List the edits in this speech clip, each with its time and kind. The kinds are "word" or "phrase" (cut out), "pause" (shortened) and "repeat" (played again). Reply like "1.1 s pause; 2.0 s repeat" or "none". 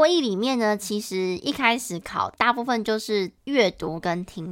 2.3 s word; 3.4 s pause